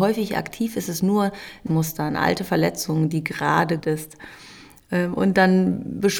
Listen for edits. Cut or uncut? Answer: cut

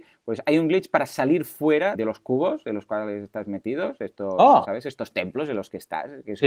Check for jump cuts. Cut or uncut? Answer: cut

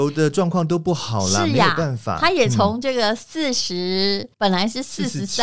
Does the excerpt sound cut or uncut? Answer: cut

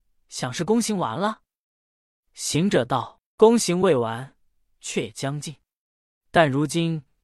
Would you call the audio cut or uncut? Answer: uncut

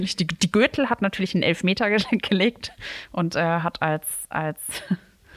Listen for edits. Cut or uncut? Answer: uncut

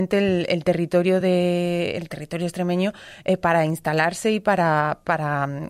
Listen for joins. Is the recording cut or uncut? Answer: uncut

